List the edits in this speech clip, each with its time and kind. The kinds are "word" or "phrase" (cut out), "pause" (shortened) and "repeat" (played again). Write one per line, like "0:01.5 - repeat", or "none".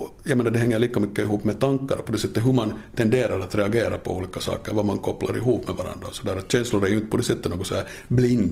none